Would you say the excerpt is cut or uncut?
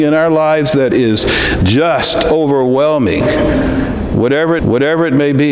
cut